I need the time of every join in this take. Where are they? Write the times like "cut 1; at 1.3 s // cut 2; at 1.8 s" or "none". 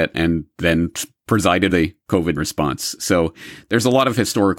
cut 1; at 1.7 s // cut 2; at 2.4 s